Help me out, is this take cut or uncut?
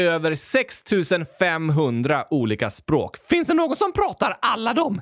uncut